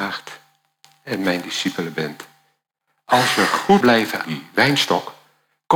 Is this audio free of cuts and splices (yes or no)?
no